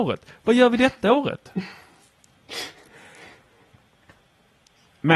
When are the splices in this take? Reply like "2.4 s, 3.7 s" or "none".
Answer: none